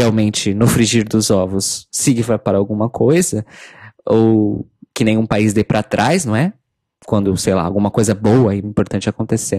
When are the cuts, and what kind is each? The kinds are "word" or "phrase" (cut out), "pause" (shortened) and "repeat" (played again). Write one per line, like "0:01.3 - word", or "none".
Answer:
0:08.6 - word